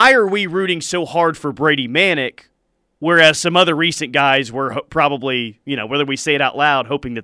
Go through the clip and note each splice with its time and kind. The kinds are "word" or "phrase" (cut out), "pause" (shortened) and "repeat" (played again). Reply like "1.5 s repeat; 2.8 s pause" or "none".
none